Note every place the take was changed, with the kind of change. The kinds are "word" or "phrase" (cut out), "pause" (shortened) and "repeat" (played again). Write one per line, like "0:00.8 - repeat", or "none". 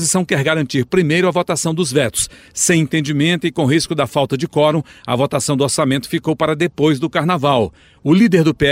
none